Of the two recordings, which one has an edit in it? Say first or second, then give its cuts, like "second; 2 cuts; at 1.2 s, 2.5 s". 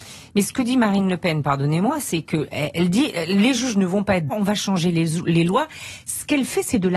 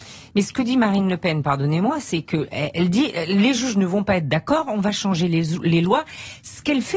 first; 1 cut; at 4.3 s